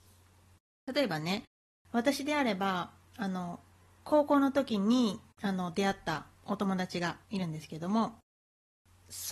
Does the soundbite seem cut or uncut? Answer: cut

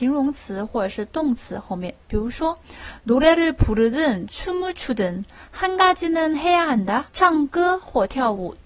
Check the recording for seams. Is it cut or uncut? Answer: cut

